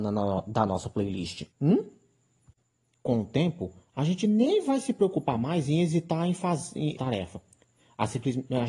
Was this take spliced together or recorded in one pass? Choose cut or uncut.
cut